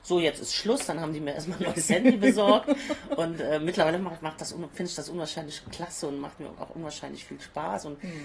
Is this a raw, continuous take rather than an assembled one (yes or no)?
yes